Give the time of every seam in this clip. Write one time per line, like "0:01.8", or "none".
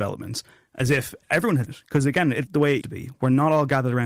0:01.7
0:02.5
0:02.8